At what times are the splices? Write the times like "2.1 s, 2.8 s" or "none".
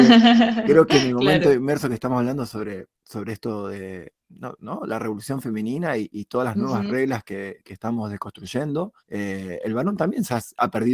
2.9 s, 4.2 s, 9.0 s